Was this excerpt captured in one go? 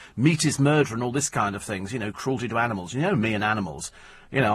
yes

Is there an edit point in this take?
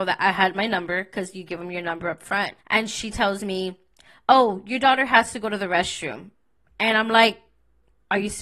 yes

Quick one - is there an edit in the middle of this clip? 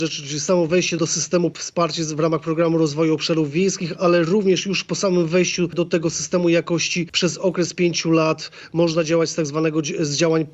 no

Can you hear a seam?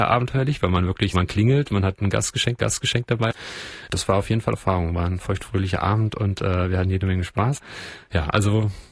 yes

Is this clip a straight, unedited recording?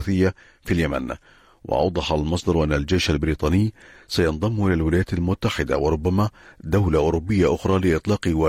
yes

